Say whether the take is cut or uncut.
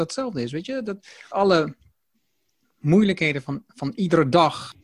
cut